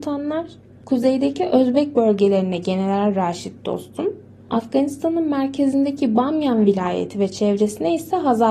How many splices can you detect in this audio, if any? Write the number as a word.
zero